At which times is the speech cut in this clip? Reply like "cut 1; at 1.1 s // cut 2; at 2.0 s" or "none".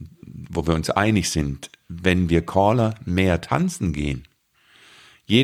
none